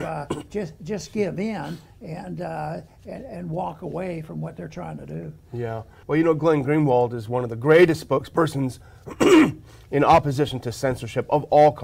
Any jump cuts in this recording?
yes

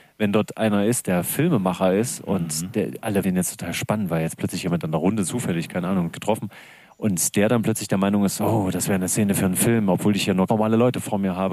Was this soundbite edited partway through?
yes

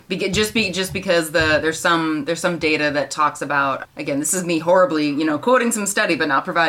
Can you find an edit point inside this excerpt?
no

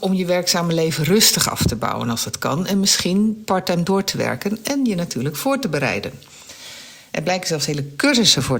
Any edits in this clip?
no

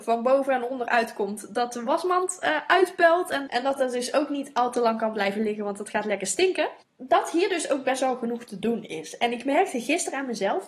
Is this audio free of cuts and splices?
yes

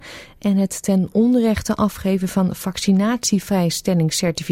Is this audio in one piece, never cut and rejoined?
yes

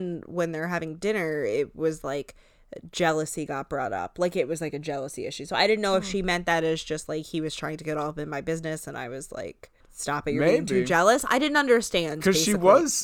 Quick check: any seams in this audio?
yes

